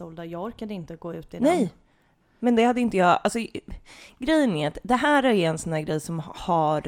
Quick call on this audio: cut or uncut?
uncut